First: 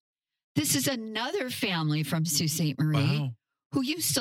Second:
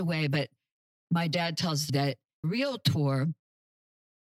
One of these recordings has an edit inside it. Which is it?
second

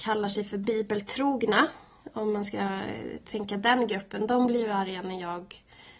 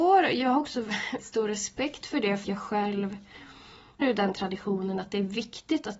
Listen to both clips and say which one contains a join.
second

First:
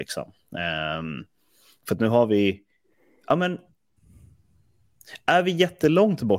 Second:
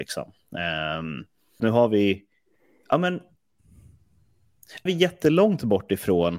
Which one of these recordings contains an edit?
second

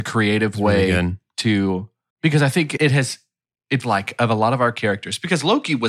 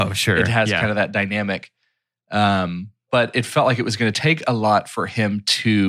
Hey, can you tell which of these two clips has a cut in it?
first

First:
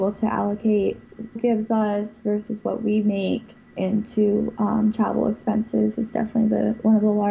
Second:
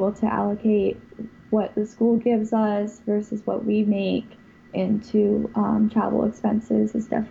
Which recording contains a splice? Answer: first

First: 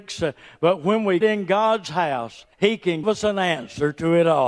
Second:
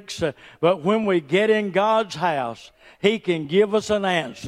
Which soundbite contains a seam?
first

